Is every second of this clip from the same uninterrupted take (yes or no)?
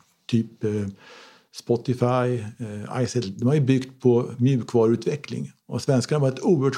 yes